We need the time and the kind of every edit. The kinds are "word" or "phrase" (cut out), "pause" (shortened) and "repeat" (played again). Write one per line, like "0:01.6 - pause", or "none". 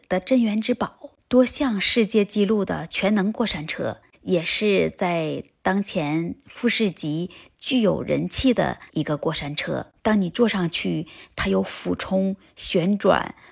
0:08.9 - pause